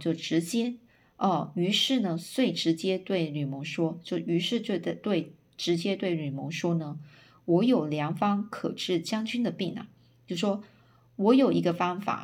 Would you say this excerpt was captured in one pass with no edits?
yes; 0 cuts

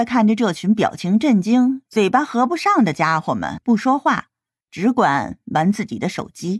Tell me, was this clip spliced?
no; 0 cuts

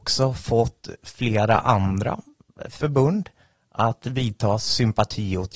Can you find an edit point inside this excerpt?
no; 0 cuts

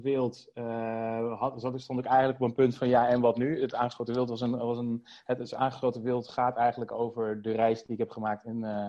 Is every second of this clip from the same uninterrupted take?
yes; 0 cuts

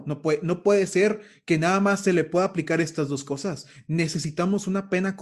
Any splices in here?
no; 0 cuts

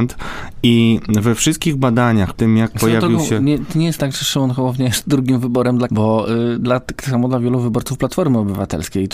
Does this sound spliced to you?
yes; 3 cuts; at 2.3 s, 4.0 s, 5.9 s

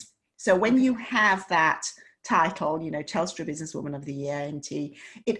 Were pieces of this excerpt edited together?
no; 0 cuts

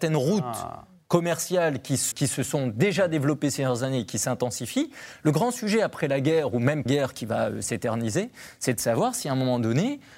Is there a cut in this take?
yes; 2 cuts; at 2.1 s, 6.9 s

